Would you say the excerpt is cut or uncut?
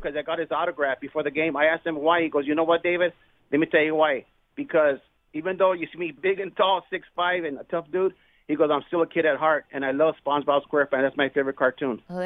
cut